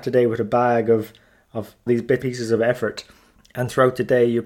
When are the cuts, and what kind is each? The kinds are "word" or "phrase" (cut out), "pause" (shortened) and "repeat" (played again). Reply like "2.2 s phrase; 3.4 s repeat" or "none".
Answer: 1.9 s word; 2.2 s word